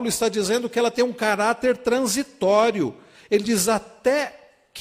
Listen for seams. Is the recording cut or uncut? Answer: uncut